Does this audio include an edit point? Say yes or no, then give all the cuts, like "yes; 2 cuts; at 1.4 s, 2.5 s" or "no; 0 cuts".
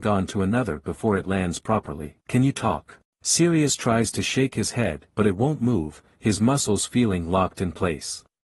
yes; 3 cuts; at 2.2 s, 3.0 s, 5.1 s